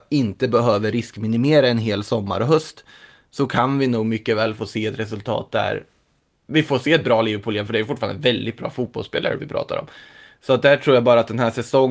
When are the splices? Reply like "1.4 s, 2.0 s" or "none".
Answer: none